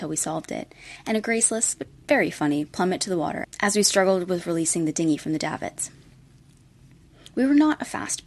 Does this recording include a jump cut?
no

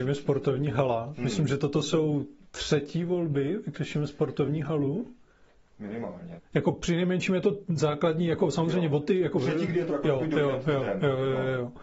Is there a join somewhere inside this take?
yes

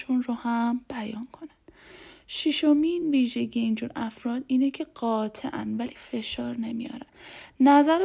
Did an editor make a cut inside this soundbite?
no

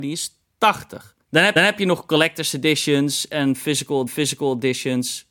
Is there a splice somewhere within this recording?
yes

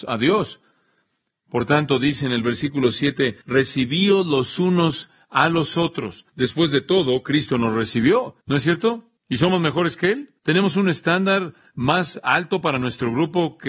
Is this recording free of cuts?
no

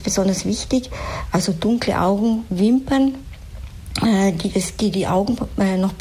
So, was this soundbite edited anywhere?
no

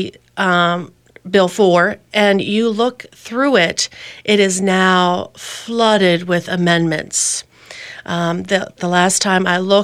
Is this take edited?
no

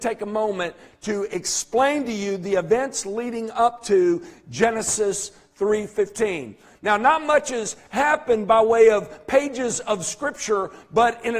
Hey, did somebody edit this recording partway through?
no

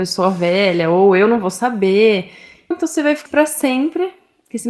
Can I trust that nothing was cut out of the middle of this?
no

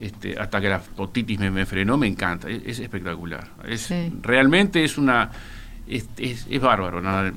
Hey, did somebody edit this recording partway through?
yes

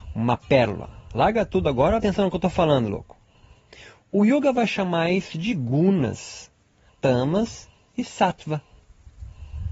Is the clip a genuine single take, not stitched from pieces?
no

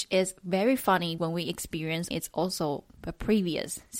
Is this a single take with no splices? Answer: no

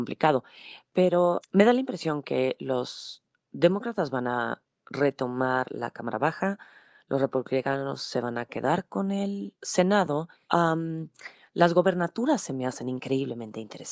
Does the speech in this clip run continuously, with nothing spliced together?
yes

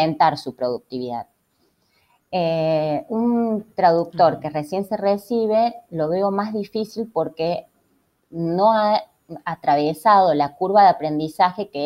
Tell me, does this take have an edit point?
no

